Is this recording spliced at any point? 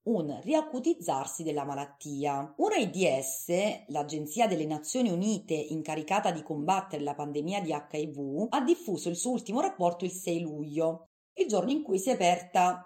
no; 0 cuts

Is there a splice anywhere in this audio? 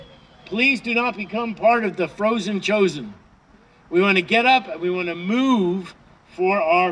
no; 0 cuts

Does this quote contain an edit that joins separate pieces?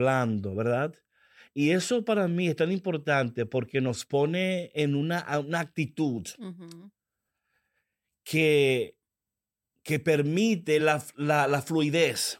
no; 0 cuts

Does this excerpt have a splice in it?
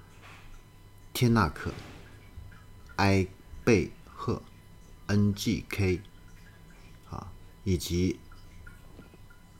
no; 0 cuts

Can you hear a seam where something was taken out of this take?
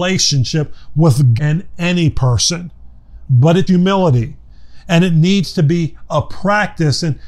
yes; 2 cuts; at 1.4 s, 3.7 s

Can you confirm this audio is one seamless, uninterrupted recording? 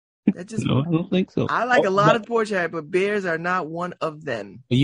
no; 1 cut; at 2.2 s

